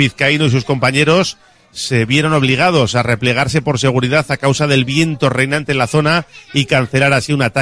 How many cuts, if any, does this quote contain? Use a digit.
0